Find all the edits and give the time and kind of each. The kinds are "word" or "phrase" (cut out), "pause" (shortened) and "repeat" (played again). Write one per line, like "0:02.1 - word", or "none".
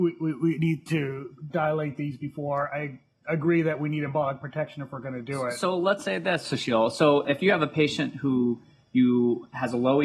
0:01.5 - word